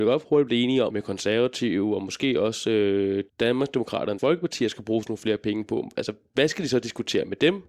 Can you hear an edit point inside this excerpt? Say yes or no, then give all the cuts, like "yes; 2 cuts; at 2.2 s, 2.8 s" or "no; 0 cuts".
yes; 3 cuts; at 0.9 s, 3.3 s, 4.2 s